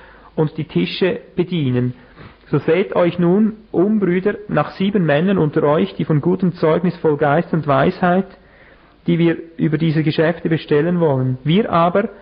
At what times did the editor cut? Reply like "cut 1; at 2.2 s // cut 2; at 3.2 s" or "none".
cut 1; at 3.6 s